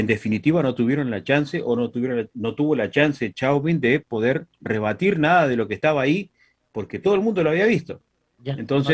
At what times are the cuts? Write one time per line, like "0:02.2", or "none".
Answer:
none